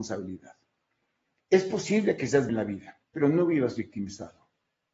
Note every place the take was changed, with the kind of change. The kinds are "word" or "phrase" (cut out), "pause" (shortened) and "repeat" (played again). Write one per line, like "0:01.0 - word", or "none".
0:02.5 - word
0:03.0 - pause